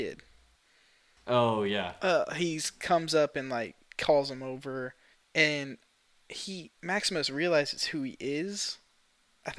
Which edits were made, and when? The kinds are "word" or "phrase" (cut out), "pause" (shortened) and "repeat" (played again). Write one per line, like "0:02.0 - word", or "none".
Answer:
0:05.1 - pause